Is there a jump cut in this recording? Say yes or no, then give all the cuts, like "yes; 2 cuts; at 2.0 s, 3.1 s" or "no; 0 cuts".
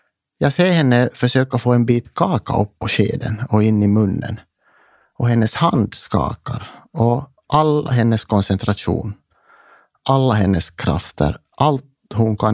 no; 0 cuts